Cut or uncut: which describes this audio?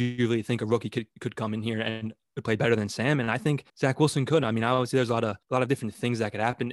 cut